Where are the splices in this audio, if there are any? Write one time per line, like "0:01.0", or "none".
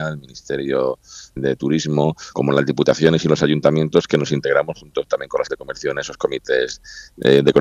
0:01.4
0:02.3
0:05.5